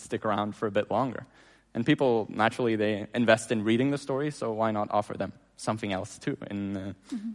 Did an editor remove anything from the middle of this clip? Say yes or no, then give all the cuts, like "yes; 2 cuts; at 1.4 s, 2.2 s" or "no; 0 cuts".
no; 0 cuts